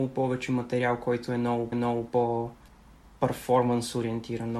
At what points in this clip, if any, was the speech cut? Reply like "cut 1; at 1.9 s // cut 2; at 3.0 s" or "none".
cut 1; at 1.7 s